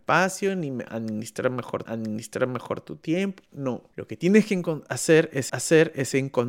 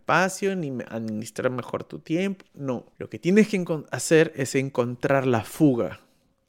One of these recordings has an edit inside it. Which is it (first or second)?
first